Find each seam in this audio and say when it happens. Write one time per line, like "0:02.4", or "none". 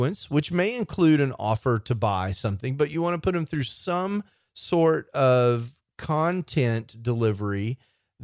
none